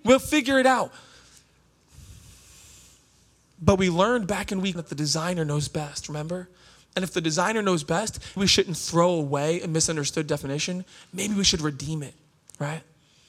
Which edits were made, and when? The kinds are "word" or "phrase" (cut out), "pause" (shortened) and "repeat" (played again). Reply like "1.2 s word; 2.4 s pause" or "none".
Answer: 4.7 s word; 8.4 s word